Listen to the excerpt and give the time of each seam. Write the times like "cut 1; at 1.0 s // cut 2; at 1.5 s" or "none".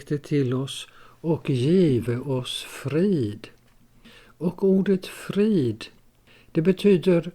none